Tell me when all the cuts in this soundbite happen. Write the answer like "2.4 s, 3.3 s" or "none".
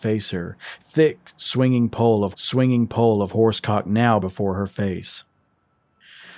2.3 s, 4.2 s